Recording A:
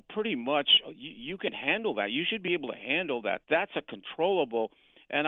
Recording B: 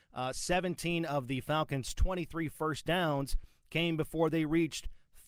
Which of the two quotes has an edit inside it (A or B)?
A